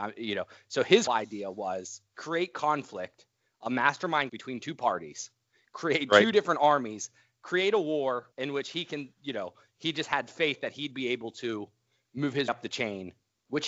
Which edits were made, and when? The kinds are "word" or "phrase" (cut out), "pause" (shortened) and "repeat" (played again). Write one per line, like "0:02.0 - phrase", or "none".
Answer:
0:01.1 - word
0:02.1 - pause
0:04.3 - word
0:08.3 - pause
0:12.5 - word